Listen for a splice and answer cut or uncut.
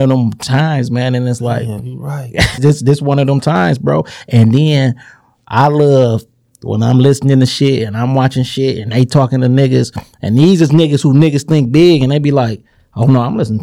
cut